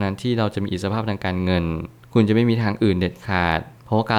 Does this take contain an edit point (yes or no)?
no